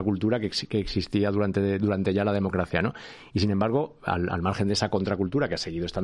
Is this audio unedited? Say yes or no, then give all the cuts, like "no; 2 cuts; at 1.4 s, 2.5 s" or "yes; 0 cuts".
yes; 0 cuts